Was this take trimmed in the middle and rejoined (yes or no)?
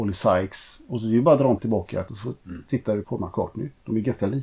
yes